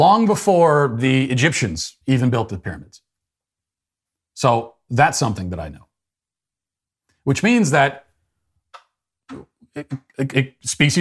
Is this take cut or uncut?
cut